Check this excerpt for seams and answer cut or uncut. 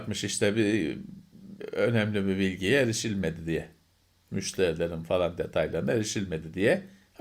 uncut